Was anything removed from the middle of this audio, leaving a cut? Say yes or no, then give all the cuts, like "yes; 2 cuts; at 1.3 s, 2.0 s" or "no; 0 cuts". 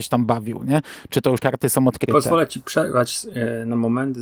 yes; 1 cut; at 1.4 s